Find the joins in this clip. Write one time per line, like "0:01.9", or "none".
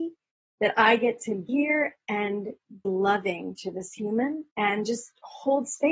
0:01.5
0:02.8
0:04.5